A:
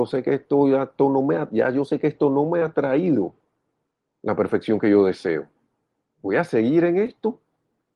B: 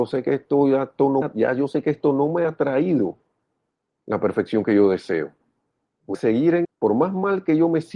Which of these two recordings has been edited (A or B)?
B